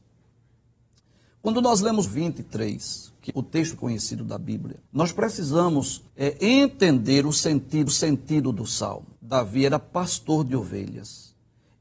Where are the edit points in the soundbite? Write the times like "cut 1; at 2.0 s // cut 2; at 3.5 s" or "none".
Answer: cut 1; at 2.0 s // cut 2; at 3.3 s // cut 3; at 3.8 s // cut 4; at 4.9 s // cut 5; at 6.1 s // cut 6; at 7.9 s // cut 7; at 9.2 s